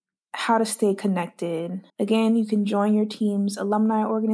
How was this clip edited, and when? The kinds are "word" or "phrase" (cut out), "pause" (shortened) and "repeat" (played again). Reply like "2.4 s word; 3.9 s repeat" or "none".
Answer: 1.9 s pause